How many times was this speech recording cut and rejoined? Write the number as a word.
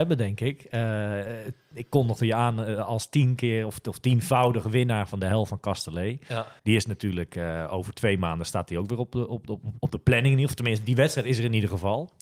one